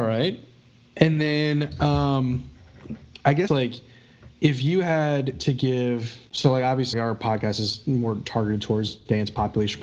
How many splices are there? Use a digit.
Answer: 3